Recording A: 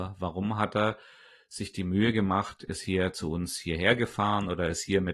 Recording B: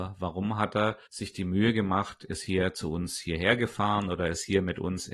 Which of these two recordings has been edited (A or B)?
B